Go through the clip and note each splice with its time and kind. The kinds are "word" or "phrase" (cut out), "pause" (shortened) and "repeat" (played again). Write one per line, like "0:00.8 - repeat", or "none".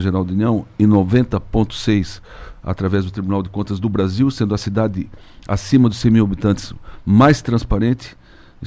none